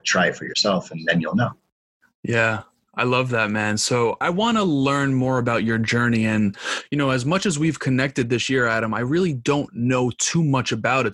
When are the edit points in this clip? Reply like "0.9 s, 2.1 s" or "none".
4.2 s